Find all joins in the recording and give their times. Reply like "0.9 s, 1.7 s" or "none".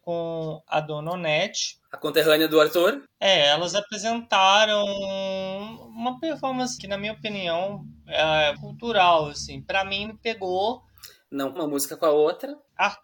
6.8 s, 8.6 s, 10.1 s, 11.6 s

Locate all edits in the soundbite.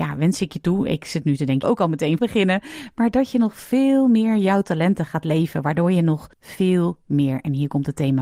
1.6 s, 2.2 s, 6.3 s

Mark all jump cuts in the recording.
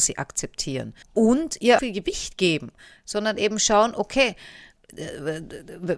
1.0 s, 1.8 s, 4.8 s

